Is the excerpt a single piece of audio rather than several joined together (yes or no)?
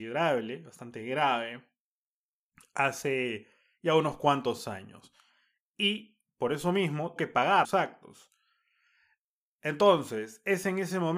no